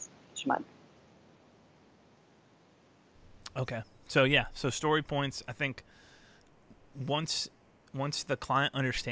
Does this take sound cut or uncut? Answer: uncut